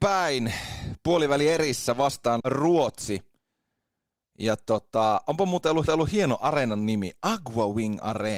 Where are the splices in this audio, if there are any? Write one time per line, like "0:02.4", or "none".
0:02.4
0:05.9